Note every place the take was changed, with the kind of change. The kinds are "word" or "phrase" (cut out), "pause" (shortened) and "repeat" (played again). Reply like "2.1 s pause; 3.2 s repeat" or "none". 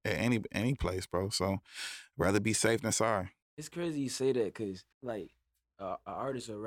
4.9 s pause